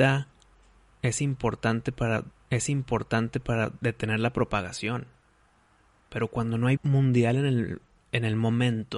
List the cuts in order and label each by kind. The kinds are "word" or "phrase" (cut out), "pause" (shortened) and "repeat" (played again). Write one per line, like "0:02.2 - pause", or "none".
0:02.3 - repeat
0:06.8 - word

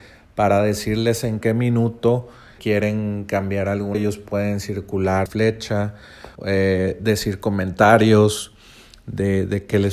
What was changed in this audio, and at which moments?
0:01.4 - phrase
0:02.6 - word
0:03.9 - word
0:05.3 - phrase
0:06.4 - pause

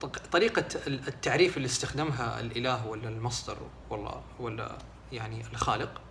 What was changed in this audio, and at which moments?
none

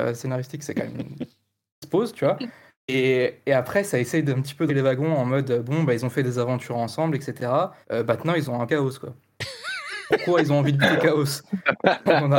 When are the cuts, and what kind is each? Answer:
0:02.7 - pause
0:04.7 - word
0:07.8 - pause
0:08.7 - phrase

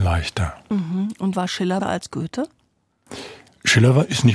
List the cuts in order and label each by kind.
0:01.3 - word
0:01.8 - word

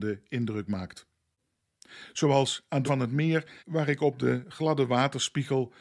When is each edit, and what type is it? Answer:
0:02.9 - word
0:03.6 - pause

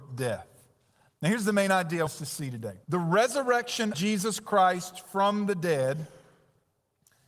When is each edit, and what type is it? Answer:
0:02.1 - word
0:02.8 - pause
0:03.9 - word

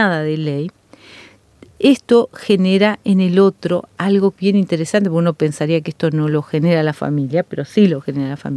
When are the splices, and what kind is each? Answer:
0:04.4 - word

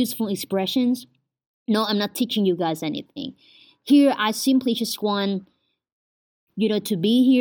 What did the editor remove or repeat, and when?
none

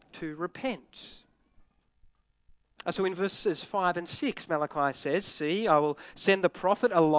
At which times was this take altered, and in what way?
none

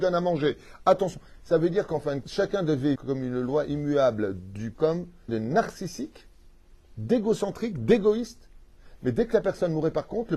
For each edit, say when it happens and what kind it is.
0:02.2 - word
0:03.0 - word
0:04.7 - word
0:05.3 - word

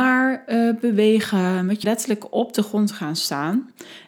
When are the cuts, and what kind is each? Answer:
0:01.8 - phrase

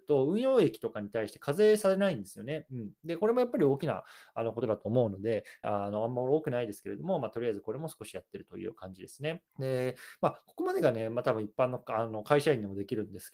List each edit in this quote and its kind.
0:05.6 - phrase
0:09.5 - pause

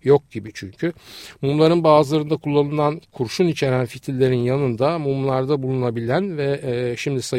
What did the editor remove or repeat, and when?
none

